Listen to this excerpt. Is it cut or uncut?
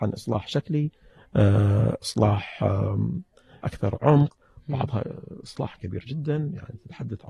cut